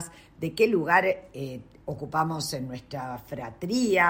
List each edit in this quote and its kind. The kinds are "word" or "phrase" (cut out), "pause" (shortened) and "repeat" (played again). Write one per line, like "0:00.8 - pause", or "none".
none